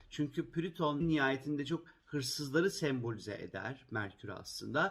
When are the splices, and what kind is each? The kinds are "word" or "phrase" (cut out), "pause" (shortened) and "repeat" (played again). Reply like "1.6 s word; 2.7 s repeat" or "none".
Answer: 1.0 s phrase